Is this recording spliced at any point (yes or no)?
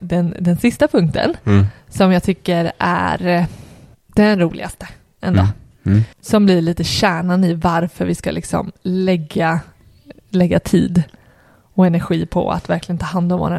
yes